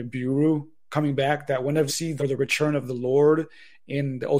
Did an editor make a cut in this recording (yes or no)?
yes